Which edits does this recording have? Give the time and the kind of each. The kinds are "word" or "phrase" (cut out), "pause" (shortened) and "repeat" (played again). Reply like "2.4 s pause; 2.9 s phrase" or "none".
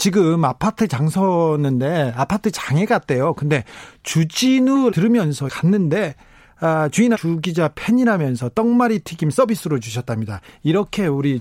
4.9 s word; 5.5 s word; 7.1 s word